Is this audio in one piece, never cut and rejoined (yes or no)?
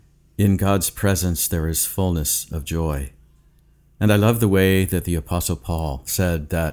yes